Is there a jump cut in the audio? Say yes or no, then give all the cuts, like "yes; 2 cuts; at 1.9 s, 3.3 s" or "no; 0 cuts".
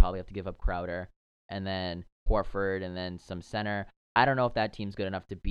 no; 0 cuts